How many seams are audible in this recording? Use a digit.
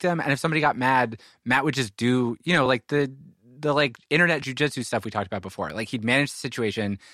0